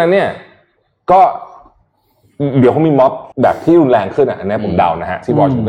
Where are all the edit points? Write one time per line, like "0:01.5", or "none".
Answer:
0:03.3

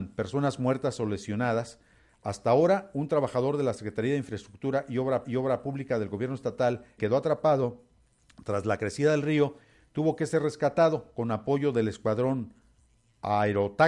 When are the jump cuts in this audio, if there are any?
0:05.2
0:07.0

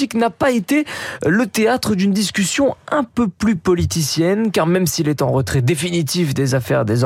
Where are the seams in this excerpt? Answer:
none

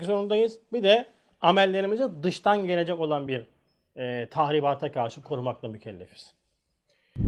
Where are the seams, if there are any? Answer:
none

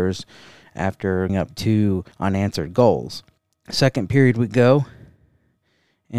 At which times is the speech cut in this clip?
0:01.3
0:02.1
0:03.4

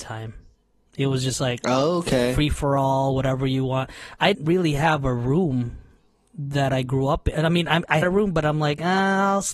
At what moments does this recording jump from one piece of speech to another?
0:04.3
0:08.0

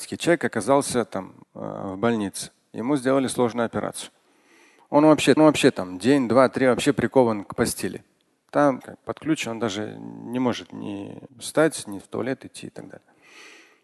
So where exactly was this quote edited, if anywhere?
0:01.4
0:05.4
0:08.8
0:11.3

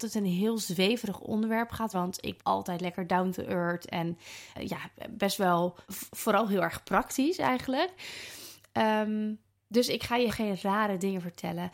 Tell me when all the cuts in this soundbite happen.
0:01.9
0:02.4
0:04.5
0:05.8
0:09.5
0:10.3

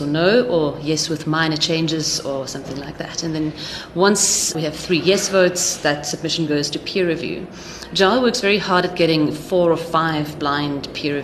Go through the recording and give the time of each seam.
none

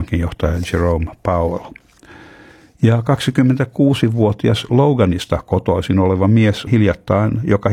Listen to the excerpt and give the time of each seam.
0:06.7

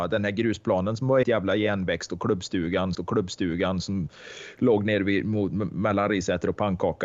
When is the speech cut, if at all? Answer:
0:01.2
0:02.9

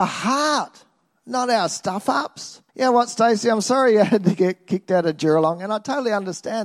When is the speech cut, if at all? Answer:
0:02.7

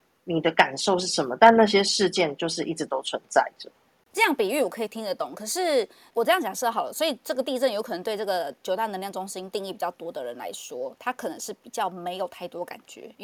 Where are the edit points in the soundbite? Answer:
none

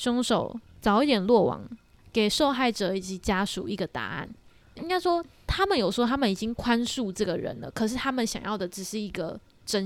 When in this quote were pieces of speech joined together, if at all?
none

